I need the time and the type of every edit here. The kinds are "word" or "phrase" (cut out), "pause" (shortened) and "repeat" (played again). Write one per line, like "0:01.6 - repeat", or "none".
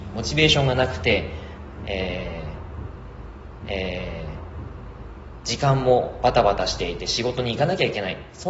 0:03.6 - repeat

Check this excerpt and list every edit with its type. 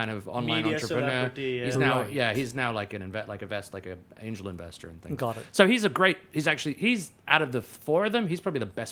none

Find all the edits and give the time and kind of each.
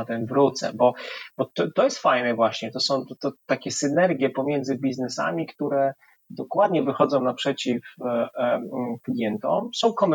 none

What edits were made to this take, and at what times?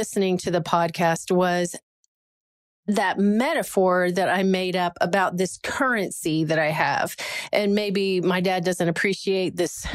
none

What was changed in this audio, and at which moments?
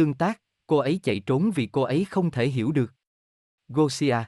none

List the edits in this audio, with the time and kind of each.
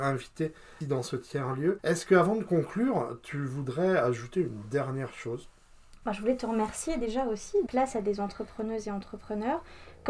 0:07.7 - phrase

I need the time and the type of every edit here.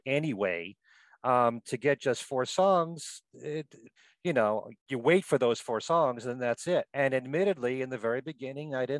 0:04.0 - pause
0:04.8 - pause
0:06.9 - pause

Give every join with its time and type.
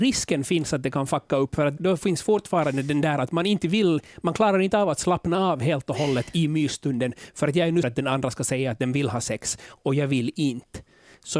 0:01.8 - word
0:07.8 - phrase

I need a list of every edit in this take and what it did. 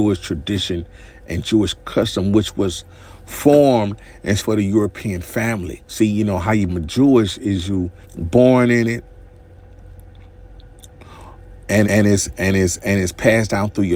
0:04.4 - word
0:05.9 - pause
0:06.7 - word
0:08.0 - pause
0:11.8 - repeat

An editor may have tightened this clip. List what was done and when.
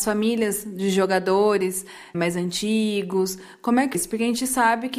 0:02.1 - word
0:03.9 - word

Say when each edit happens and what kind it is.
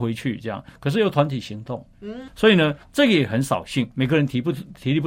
0:02.3 - word

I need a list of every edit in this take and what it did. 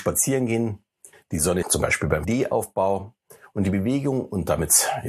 0:01.1 - pause
0:01.6 - word
0:02.2 - word

